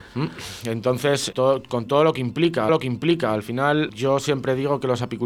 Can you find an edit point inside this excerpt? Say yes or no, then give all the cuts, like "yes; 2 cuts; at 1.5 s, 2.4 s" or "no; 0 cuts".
yes; 3 cuts; at 1.3 s, 2.7 s, 3.9 s